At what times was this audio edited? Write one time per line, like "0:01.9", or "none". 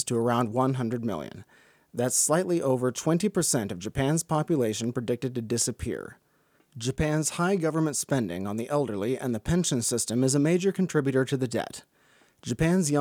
none